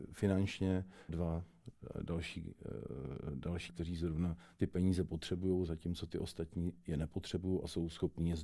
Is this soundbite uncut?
no; 2 cuts; at 1.1 s, 3.7 s

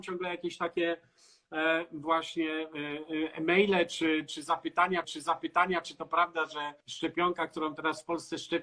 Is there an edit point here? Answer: yes; 2 cuts; at 5.0 s, 6.8 s

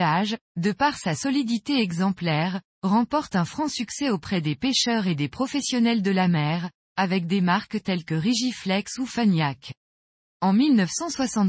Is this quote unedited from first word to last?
yes; 0 cuts

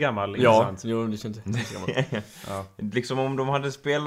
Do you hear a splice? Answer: no; 0 cuts

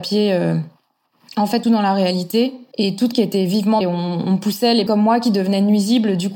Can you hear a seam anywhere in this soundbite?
yes; 4 cuts; at 1.6 s, 3.1 s, 3.8 s, 4.9 s

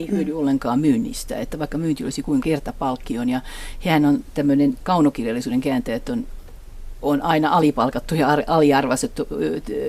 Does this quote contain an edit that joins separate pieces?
yes; 1 cut; at 2.4 s

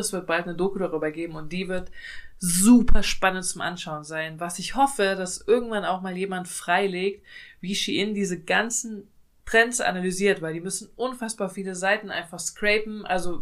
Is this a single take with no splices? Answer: yes; 0 cuts

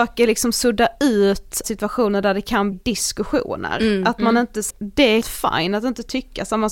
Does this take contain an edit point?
yes; 4 cuts; at 1.6 s, 2.7 s, 4.7 s, 5.2 s

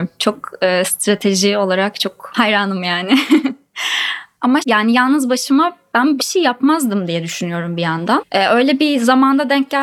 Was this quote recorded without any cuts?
no; 2 cuts; at 4.6 s, 6.2 s

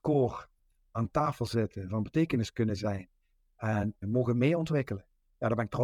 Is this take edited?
no; 0 cuts

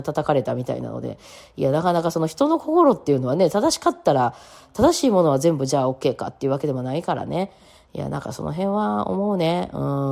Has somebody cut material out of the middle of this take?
no; 0 cuts

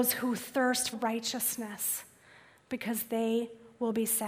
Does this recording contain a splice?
yes; 1 cut; at 0.9 s

